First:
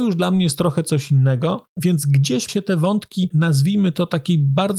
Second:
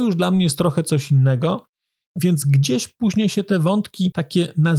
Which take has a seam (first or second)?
first